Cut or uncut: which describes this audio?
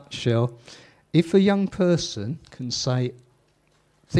uncut